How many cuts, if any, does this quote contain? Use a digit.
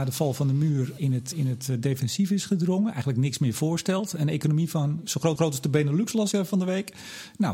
4